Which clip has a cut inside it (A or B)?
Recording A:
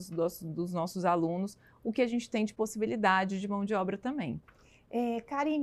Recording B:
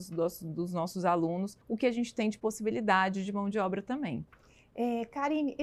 B